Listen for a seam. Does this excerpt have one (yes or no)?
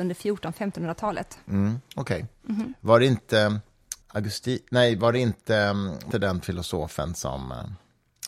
yes